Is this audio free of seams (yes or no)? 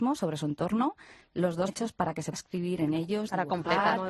no